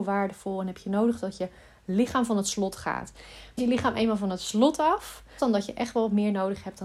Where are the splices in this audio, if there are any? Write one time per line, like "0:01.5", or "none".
0:03.6
0:05.4